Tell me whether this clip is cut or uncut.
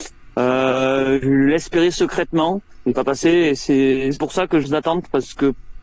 cut